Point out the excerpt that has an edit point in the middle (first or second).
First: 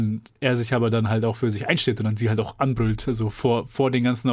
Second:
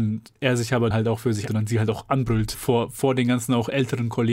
second